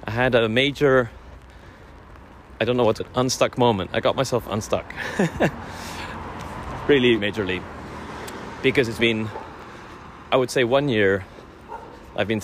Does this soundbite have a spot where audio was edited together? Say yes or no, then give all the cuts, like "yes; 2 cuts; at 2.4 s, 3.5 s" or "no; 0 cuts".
yes; 3 cuts; at 3.0 s, 7.2 s, 9.0 s